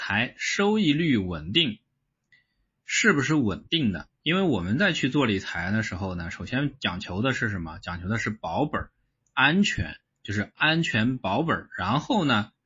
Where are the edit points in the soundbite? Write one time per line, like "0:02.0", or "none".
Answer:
none